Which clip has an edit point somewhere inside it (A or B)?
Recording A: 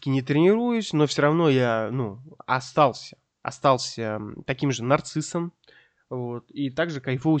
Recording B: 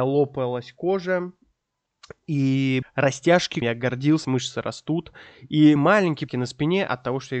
B